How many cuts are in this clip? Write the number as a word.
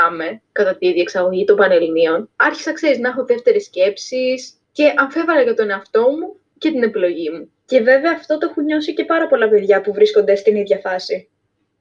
three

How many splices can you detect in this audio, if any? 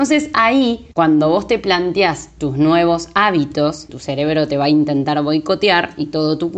two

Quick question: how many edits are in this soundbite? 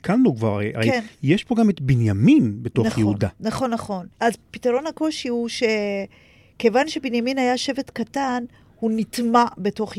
one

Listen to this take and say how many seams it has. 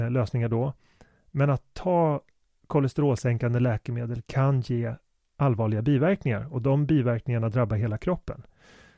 zero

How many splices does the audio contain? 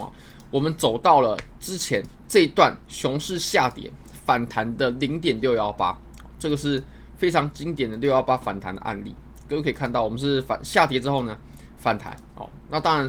one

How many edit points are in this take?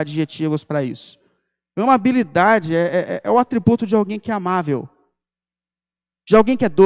zero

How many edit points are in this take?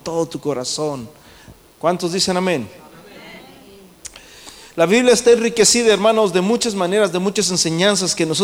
zero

